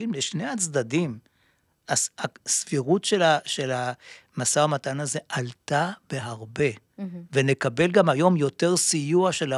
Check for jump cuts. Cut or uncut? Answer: uncut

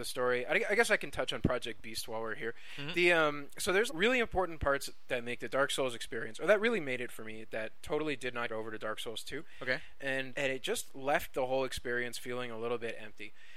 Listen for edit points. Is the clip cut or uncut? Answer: cut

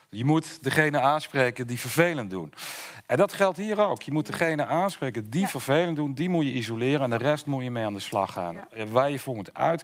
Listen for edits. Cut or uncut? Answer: uncut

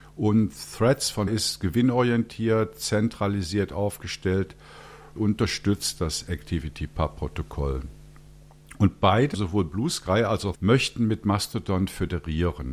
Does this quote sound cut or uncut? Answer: cut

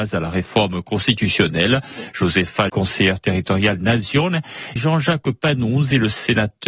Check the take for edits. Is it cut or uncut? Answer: cut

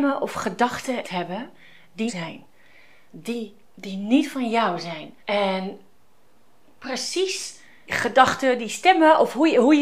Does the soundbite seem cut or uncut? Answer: cut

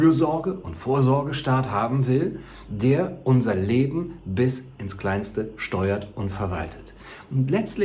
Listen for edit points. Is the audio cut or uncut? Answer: uncut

